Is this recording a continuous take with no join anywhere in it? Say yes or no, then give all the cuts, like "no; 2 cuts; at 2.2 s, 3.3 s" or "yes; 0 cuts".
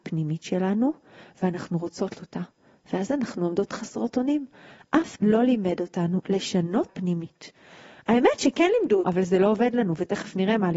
no; 4 cuts; at 2.1 s, 5.1 s, 6.9 s, 9.0 s